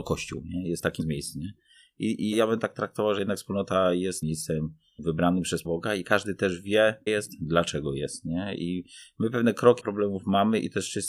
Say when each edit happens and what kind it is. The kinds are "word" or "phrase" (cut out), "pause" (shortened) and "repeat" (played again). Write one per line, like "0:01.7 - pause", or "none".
0:01.0 - word
0:02.3 - word
0:04.2 - word
0:05.6 - word
0:07.1 - word
0:09.8 - word

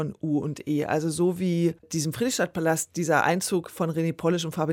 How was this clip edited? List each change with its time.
0:01.8 - pause

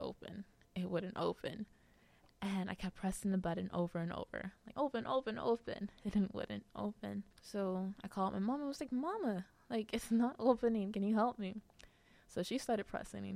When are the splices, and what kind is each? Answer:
0:04.7 - word
0:07.3 - pause

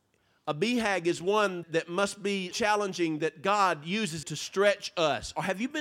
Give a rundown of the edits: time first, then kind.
0:01.6 - word
0:02.5 - word
0:04.2 - word

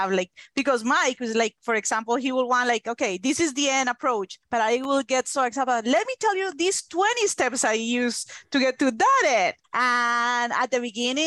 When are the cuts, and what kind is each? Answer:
0:04.4 - pause
0:09.6 - pause

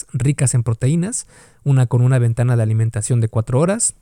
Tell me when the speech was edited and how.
none

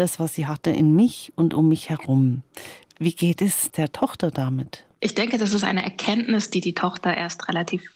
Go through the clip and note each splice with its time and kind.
0:04.9 - pause

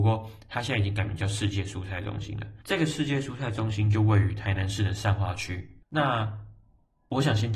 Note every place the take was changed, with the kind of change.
0:02.6 - pause
0:05.8 - pause

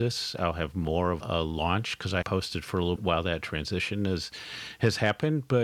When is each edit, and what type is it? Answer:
0:01.2 - word
0:02.2 - word
0:03.0 - word

